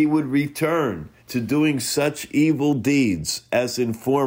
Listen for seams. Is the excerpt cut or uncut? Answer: cut